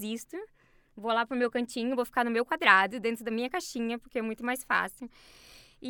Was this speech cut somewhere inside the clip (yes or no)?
no